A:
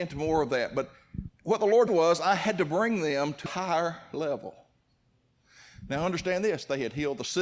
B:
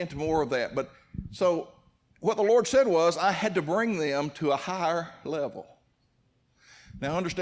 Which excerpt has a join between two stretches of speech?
A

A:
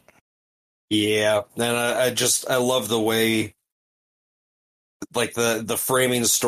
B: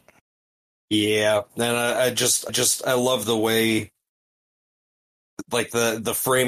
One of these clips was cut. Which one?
B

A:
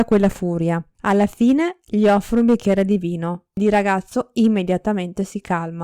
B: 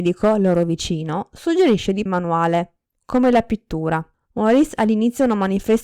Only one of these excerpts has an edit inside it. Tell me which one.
B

